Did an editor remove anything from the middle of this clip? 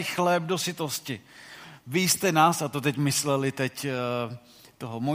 no; 0 cuts

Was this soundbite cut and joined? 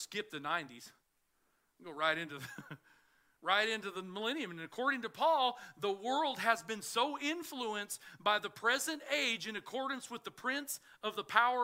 no; 0 cuts

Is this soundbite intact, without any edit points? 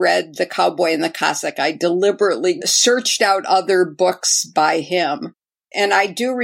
yes; 0 cuts

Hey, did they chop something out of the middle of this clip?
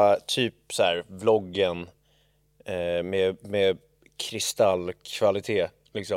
no; 0 cuts

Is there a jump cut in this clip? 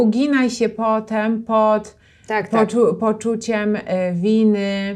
no; 0 cuts

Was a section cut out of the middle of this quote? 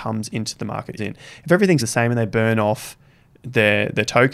yes; 2 cuts; at 1.0 s, 1.8 s

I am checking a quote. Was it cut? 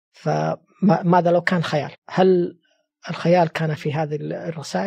yes; 2 cuts; at 1.9 s, 3.8 s

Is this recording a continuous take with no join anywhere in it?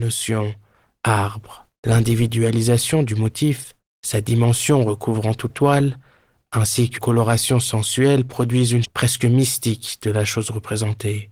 no; 5 cuts; at 1.7 s, 3.8 s, 5.5 s, 7.0 s, 8.8 s

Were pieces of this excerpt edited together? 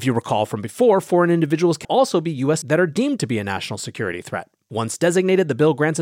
yes; 2 cuts; at 1.8 s, 2.6 s

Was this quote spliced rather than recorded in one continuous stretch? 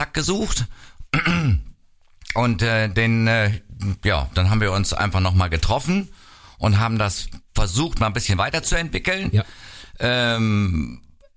yes; 1 cut; at 7.5 s

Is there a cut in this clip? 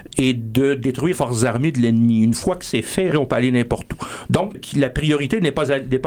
yes; 3 cuts; at 1.1 s, 3.1 s, 4.5 s

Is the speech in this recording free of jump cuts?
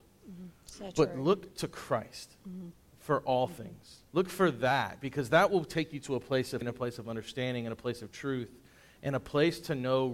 no; 2 cuts; at 4.1 s, 6.6 s

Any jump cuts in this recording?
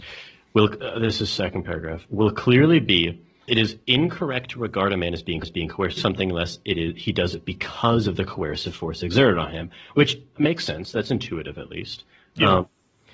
yes; 4 cuts; at 3.5 s, 5.4 s, 6.0 s, 10.4 s

